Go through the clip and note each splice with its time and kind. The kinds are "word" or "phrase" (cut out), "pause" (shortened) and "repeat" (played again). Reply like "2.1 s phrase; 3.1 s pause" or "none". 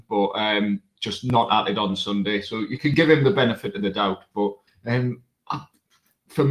4.7 s pause